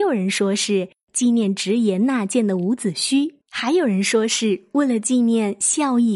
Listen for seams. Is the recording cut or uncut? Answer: cut